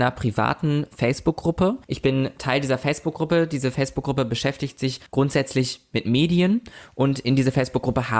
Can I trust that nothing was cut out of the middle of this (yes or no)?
no